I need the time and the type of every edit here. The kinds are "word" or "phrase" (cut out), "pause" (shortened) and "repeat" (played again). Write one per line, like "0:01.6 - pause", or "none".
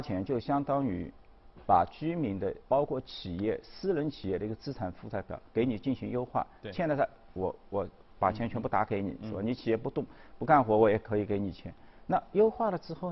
0:02.6 - pause

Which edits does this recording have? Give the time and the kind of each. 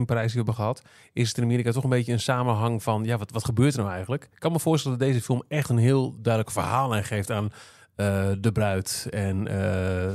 none

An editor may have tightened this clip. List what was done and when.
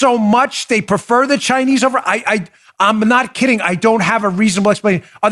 none

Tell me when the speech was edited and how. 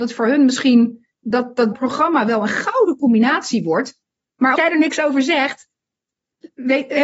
0:01.1 - pause
0:01.7 - phrase
0:04.6 - word

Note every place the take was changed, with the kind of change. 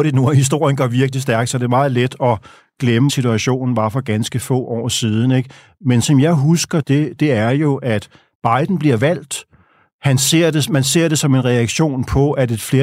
0:03.1 - word
0:06.0 - word
0:06.8 - phrase

